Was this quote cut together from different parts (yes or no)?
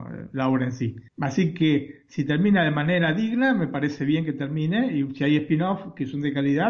yes